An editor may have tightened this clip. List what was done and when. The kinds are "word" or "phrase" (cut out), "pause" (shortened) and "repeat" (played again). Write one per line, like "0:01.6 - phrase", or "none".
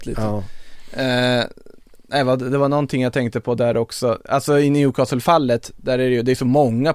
none